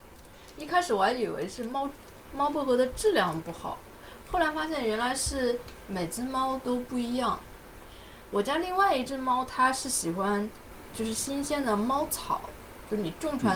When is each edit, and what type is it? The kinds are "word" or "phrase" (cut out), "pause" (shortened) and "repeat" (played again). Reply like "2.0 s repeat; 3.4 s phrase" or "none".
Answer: 10.9 s word